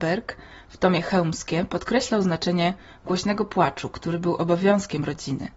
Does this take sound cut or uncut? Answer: uncut